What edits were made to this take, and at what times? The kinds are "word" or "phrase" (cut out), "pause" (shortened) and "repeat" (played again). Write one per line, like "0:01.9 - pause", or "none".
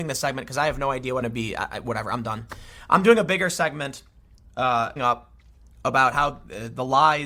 0:01.2 - phrase
0:05.0 - word